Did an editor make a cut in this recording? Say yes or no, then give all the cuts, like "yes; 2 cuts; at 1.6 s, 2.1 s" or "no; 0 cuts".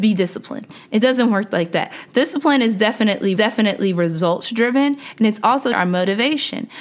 yes; 2 cuts; at 3.4 s, 5.7 s